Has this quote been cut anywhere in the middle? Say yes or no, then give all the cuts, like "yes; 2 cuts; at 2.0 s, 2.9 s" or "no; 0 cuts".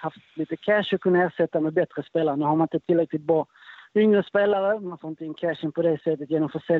no; 0 cuts